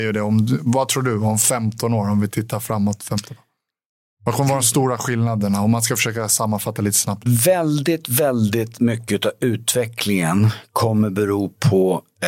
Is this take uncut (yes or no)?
yes